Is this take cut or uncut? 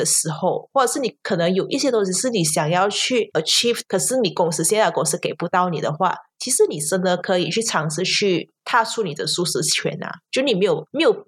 cut